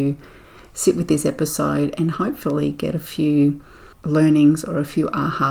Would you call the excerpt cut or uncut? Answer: cut